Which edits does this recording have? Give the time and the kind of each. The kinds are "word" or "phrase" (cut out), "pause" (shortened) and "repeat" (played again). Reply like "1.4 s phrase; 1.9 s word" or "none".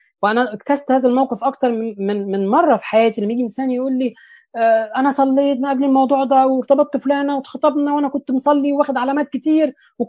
none